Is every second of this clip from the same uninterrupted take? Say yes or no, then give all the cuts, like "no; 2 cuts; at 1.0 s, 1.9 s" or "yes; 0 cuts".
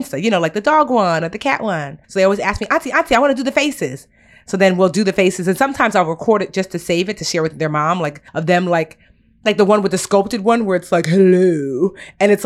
no; 2 cuts; at 2.0 s, 8.3 s